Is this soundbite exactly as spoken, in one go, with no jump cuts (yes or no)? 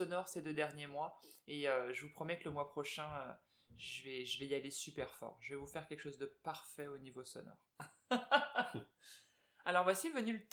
yes